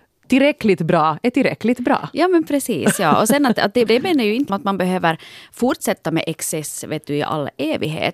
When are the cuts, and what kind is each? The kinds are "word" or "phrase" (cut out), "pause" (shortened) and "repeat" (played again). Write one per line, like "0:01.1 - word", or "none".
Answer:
0:03.9 - word
0:04.5 - word